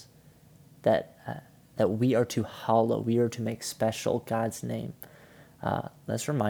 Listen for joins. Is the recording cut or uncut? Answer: uncut